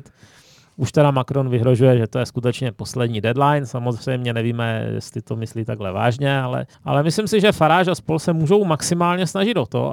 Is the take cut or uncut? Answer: cut